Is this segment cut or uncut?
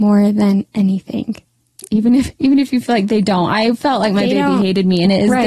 uncut